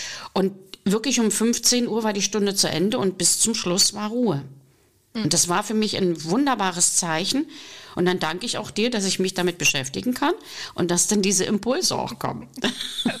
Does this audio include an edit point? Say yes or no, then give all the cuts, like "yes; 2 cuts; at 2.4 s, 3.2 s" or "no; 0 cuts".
no; 0 cuts